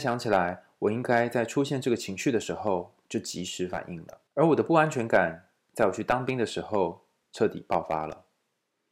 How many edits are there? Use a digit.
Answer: 1